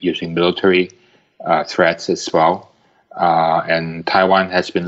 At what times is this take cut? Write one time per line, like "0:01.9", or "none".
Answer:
none